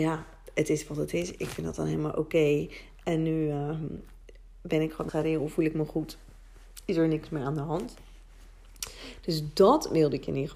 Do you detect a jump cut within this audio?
yes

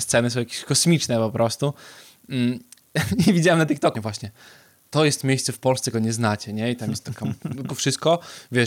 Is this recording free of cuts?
no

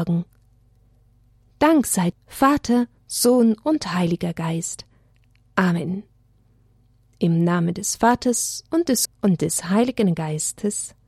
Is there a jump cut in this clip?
yes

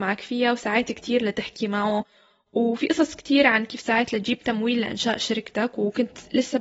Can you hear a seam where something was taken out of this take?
no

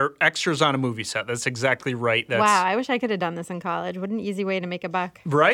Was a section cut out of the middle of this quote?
no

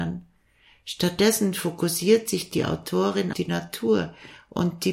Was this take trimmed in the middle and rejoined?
yes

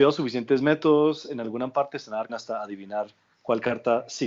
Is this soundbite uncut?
no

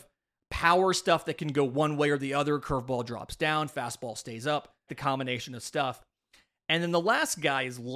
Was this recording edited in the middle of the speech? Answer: yes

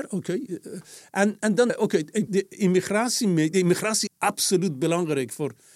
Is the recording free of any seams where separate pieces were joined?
no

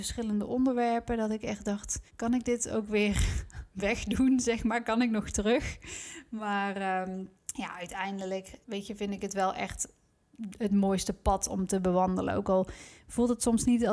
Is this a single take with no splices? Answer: no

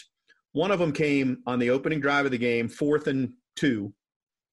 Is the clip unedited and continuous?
yes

